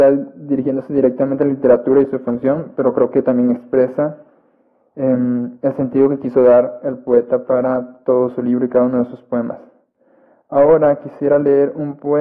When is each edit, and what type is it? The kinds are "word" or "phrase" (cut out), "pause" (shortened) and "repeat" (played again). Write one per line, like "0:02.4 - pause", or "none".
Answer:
none